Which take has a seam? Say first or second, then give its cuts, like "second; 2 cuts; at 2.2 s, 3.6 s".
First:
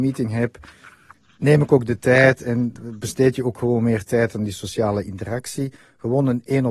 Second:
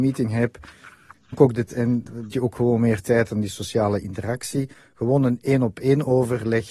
second; 3 cuts; at 1.3 s, 1.7 s, 2.3 s